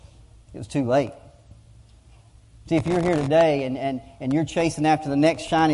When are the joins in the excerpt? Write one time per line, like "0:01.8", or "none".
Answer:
none